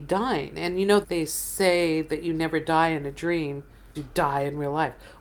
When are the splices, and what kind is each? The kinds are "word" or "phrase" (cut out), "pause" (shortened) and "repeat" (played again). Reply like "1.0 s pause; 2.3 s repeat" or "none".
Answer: 1.0 s word; 3.9 s word

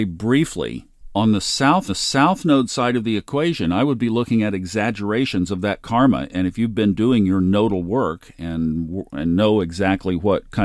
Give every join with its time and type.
1.9 s repeat

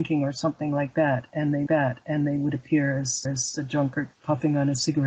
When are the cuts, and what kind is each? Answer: 1.7 s repeat; 3.2 s repeat; 4.1 s pause

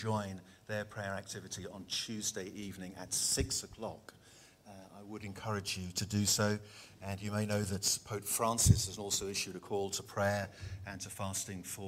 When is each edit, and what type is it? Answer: none

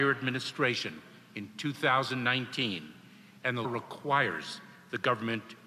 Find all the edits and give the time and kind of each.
3.6 s word

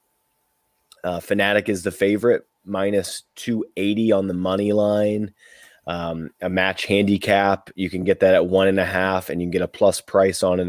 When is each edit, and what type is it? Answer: none

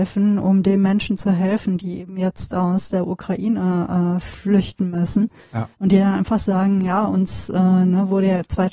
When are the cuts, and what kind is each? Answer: 5.7 s pause

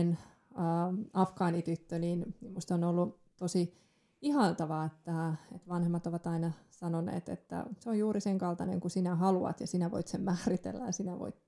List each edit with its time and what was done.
none

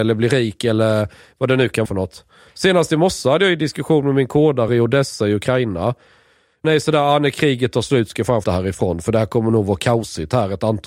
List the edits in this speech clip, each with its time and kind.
1.9 s word; 4.7 s word; 6.6 s word; 8.4 s word

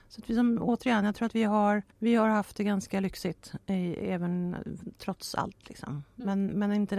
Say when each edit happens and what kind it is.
1.9 s pause

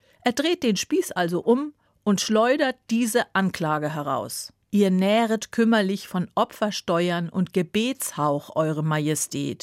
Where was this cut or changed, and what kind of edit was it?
1.9 s pause; 4.6 s pause

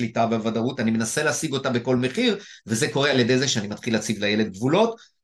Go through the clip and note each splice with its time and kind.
none

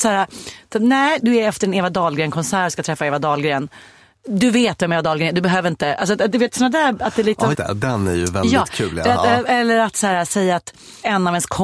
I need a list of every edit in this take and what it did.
7.5 s word

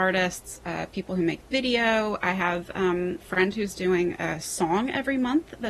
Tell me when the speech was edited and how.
3.2 s word

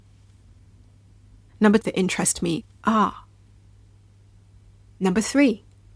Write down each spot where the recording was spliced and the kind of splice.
1.8 s phrase

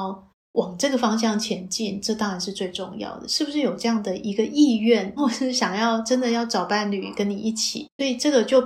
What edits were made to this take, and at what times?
5.2 s phrase

